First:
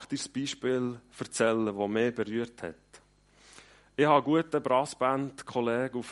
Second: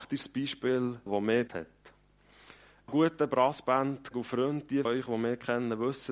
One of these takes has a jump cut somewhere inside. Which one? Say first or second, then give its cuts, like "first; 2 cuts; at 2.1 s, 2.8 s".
second; 5 cuts; at 1.1 s, 1.5 s, 2.9 s, 4.1 s, 4.9 s